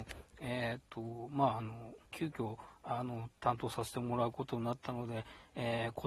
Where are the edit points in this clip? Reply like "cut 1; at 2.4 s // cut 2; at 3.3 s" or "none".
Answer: cut 1; at 2.0 s // cut 2; at 3.4 s